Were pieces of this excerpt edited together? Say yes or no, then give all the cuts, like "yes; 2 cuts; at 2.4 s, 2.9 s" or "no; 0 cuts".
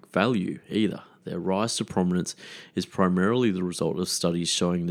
no; 0 cuts